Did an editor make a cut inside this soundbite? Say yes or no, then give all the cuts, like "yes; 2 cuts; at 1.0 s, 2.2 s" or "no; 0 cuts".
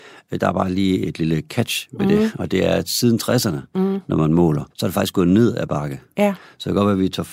yes; 1 cut; at 4.7 s